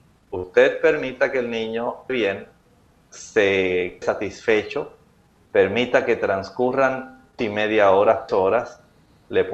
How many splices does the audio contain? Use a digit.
4